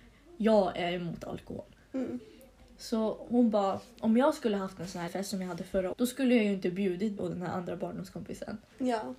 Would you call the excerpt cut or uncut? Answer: cut